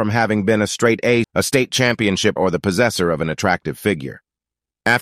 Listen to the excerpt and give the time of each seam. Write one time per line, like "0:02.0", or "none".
0:01.2
0:02.4